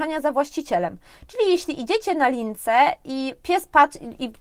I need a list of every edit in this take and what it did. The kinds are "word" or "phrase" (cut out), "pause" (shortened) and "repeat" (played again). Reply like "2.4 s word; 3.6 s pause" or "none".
none